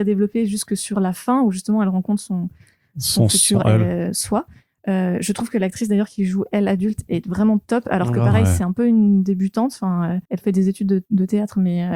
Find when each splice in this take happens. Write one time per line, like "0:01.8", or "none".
0:10.3